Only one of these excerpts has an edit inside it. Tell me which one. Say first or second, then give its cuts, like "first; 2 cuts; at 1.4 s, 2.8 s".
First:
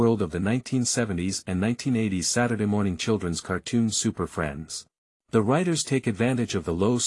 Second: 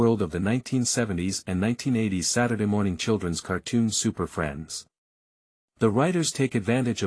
first; 1 cut; at 5.0 s